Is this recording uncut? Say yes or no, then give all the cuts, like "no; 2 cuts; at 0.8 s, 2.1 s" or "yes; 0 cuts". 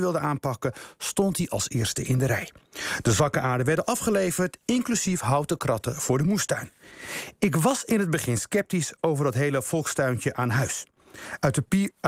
yes; 0 cuts